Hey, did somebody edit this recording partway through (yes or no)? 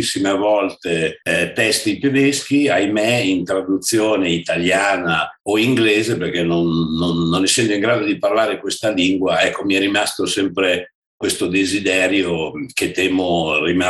yes